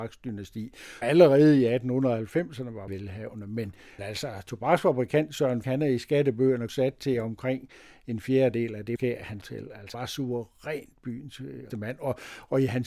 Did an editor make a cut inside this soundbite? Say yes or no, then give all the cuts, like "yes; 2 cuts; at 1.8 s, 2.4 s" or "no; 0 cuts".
yes; 9 cuts; at 1.0 s, 2.9 s, 4.0 s, 5.6 s, 6.7 s, 9.0 s, 9.4 s, 9.9 s, 11.7 s